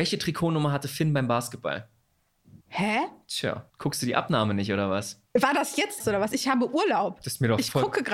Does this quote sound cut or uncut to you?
cut